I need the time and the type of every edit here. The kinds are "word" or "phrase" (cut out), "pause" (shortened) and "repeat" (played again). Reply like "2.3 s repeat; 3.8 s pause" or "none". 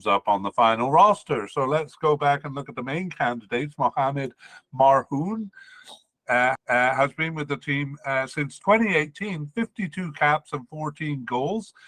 6.6 s repeat